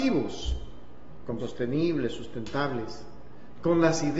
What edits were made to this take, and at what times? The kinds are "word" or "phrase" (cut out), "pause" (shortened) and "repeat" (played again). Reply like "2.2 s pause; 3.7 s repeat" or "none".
1.4 s word